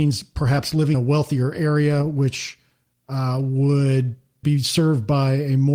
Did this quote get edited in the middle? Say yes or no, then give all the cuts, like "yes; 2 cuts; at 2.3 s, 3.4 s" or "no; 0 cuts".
yes; 2 cuts; at 0.9 s, 4.4 s